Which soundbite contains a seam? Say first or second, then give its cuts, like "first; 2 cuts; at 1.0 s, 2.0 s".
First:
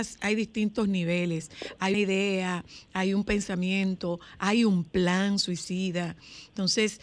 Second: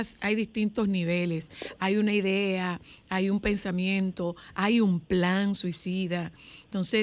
first; 1 cut; at 1.9 s